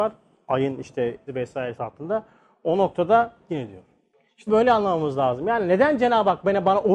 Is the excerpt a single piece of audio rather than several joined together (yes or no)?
no